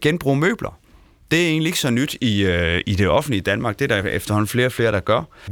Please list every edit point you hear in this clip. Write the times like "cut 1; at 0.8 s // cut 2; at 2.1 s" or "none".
none